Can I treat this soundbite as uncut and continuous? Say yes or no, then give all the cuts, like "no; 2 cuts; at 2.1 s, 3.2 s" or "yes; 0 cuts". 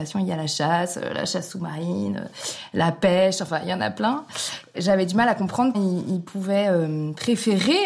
no; 1 cut; at 5.7 s